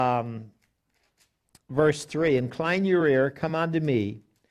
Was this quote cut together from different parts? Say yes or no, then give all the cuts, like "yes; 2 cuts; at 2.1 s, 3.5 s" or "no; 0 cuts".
no; 0 cuts